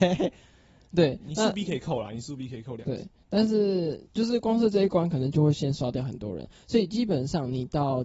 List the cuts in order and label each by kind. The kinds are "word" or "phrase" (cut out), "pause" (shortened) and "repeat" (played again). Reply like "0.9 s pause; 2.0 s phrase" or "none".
4.1 s pause